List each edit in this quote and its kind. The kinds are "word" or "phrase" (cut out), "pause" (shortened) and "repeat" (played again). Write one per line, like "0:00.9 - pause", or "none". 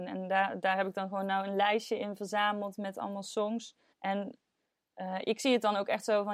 0:03.9 - pause